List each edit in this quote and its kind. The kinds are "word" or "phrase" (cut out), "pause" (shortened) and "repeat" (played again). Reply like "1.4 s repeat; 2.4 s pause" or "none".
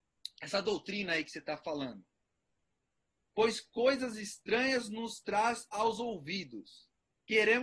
none